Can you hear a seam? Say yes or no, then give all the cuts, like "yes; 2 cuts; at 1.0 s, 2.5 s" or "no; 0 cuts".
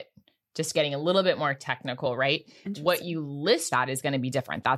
yes; 1 cut; at 3.7 s